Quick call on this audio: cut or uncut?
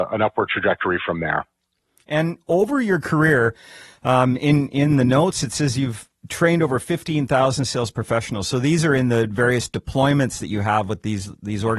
uncut